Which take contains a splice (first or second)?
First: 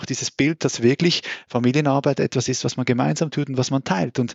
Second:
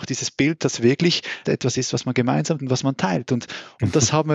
second